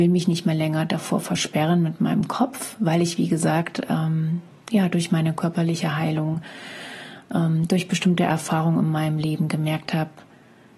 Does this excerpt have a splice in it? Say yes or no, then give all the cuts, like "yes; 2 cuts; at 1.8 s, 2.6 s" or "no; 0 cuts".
no; 0 cuts